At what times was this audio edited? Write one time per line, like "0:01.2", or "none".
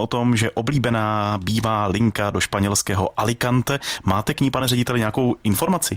none